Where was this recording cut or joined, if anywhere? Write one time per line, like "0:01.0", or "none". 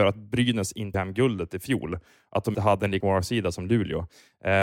0:00.9
0:02.5
0:03.0